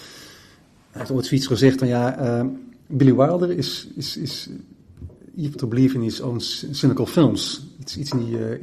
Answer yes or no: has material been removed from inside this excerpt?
yes